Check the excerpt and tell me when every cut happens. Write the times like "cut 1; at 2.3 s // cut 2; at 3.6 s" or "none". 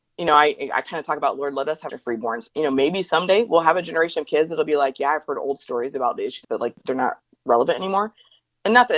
cut 1; at 1.9 s // cut 2; at 6.4 s